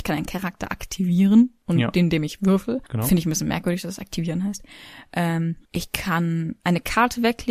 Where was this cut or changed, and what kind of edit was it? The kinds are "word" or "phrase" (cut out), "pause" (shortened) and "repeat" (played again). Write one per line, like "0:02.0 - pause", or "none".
0:02.9 - pause
0:05.6 - pause